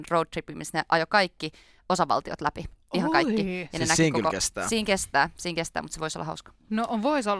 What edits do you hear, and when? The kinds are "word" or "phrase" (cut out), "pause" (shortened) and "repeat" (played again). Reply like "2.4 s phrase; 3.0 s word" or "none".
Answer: none